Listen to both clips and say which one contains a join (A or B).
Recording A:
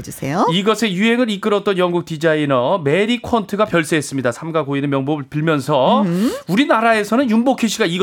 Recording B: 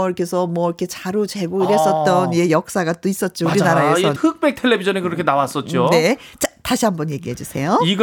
B